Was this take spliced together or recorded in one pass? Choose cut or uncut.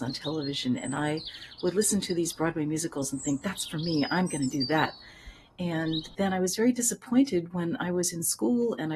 uncut